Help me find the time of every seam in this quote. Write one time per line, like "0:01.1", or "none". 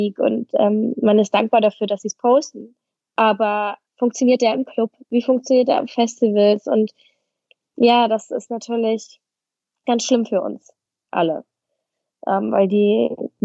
0:09.8